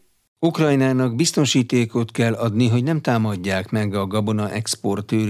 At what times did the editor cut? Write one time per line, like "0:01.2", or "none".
none